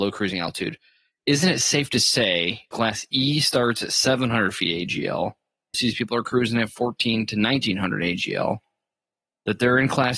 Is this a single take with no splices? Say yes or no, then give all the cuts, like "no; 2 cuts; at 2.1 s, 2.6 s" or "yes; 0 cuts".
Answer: no; 2 cuts; at 2.7 s, 5.7 s